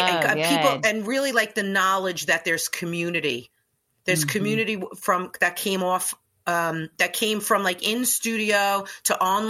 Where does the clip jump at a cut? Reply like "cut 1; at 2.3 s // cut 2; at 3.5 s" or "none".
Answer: cut 1; at 3.7 s